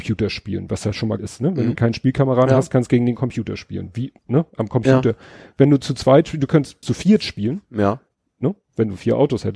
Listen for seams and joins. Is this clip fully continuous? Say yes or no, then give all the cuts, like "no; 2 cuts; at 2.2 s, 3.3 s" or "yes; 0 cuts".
no; 4 cuts; at 1.2 s, 1.7 s, 4.2 s, 6.8 s